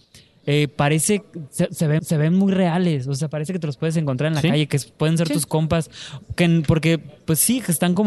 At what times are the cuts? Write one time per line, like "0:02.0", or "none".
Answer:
0:02.0